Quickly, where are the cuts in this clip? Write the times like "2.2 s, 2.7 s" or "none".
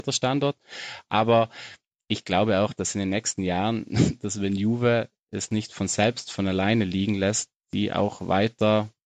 none